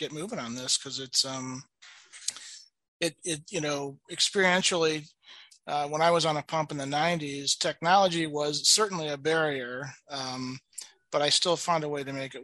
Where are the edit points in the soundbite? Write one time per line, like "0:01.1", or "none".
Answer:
none